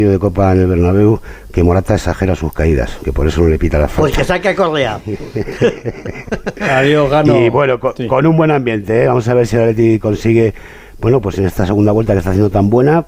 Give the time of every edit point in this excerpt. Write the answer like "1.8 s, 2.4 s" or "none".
none